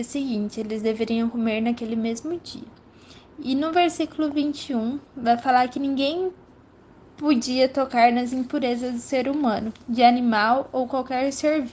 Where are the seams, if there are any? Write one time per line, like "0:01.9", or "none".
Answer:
none